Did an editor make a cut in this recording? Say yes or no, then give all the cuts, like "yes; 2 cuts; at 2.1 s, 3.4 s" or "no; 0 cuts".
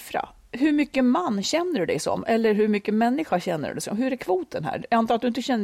no; 0 cuts